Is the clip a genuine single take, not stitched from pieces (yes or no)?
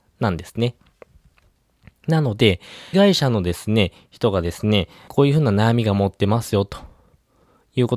no